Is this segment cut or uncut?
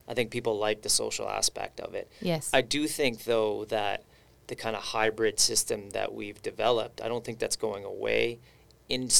uncut